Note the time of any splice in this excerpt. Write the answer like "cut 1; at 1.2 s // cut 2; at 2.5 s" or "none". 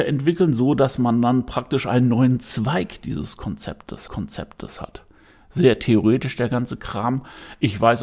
cut 1; at 4.1 s